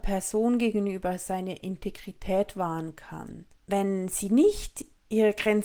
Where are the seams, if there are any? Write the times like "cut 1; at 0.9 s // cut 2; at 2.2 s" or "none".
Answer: cut 1; at 3.5 s